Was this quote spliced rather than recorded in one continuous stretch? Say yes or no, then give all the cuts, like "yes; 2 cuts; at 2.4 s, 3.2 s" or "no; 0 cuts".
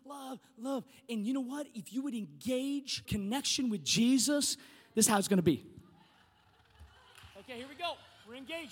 yes; 2 cuts; at 3.0 s, 7.3 s